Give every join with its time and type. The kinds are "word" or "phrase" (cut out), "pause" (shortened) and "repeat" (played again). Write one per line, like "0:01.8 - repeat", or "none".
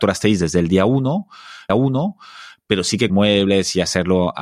0:01.7 - repeat
0:03.1 - word